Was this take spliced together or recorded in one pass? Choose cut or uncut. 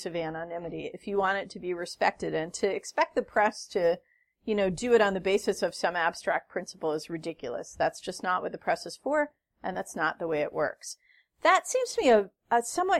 uncut